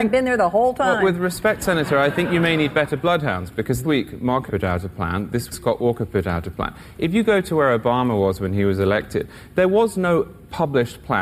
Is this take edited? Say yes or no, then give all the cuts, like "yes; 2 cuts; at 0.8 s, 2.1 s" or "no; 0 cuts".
yes; 3 cuts; at 3.8 s, 4.5 s, 5.5 s